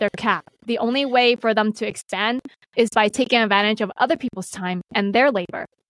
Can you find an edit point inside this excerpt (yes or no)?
no